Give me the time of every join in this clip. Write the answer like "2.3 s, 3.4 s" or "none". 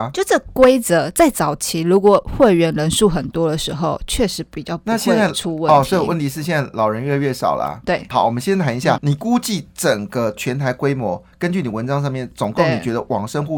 9.0 s